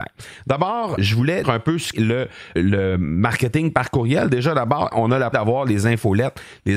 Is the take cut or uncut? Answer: cut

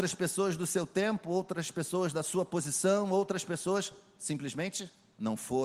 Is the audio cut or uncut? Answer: uncut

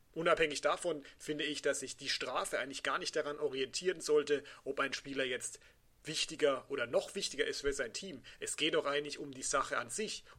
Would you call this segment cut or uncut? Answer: uncut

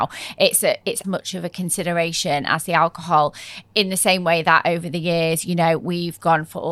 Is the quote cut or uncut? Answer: cut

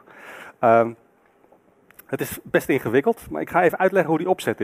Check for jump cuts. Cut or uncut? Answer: uncut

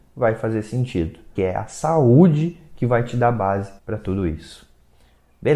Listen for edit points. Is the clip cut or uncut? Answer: cut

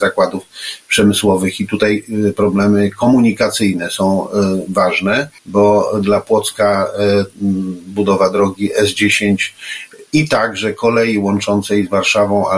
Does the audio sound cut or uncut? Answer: cut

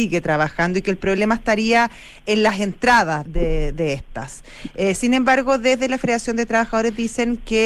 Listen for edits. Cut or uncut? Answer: cut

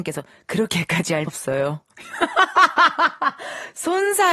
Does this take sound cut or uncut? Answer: cut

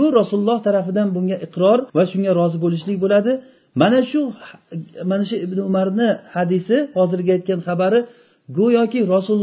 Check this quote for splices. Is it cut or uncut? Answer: cut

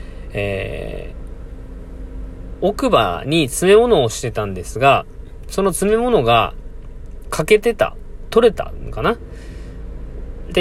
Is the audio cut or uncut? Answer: cut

